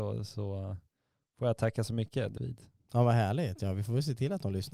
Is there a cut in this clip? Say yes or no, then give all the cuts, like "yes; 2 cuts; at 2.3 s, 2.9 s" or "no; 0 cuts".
yes; 1 cut; at 2.4 s